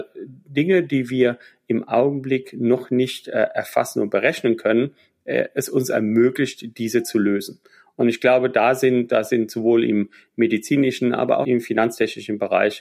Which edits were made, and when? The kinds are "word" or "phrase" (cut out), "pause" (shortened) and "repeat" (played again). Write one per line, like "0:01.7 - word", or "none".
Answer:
0:11.4 - word